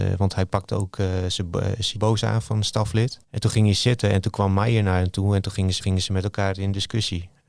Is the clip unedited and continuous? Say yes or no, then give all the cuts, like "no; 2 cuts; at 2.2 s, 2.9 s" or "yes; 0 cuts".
no; 3 cuts; at 1.9 s, 3.2 s, 5.8 s